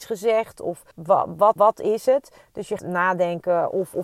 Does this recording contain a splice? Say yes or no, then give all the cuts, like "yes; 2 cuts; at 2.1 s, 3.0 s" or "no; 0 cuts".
yes; 3 cuts; at 0.9 s, 1.6 s, 2.8 s